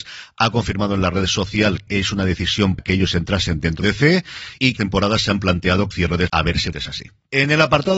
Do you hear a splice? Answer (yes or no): yes